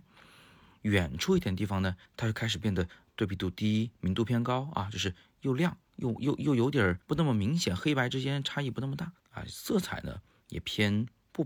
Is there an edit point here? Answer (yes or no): yes